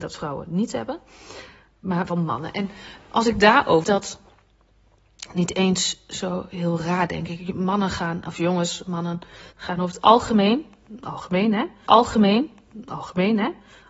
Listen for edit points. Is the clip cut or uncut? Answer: cut